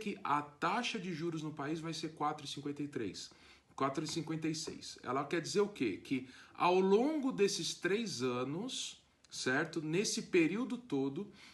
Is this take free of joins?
yes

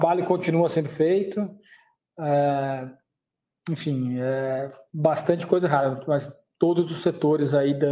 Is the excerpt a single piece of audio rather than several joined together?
yes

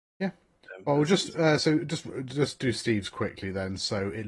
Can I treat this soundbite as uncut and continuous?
yes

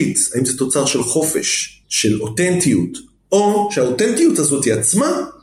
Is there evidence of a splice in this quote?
yes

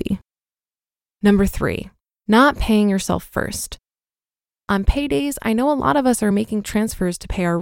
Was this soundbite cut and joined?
no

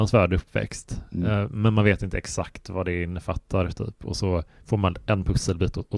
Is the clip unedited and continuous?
yes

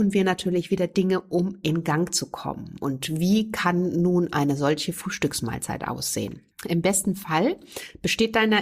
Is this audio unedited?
yes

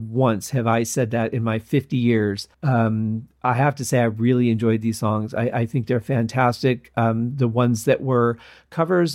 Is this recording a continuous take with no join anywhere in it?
no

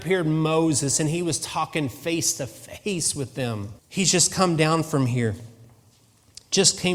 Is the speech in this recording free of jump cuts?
no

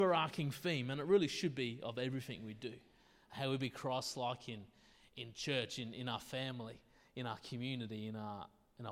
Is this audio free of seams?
yes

